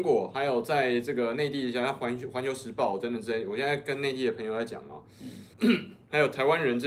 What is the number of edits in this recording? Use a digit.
1